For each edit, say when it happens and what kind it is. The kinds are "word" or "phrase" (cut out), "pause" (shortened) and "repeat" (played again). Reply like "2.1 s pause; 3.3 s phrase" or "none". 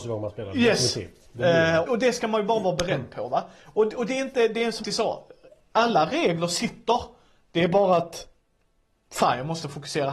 1.9 s word; 4.8 s word